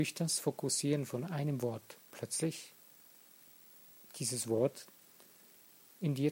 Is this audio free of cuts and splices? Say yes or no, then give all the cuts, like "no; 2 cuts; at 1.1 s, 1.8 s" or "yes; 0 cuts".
no; 1 cut; at 2.0 s